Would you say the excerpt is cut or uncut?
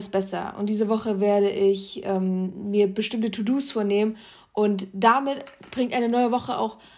uncut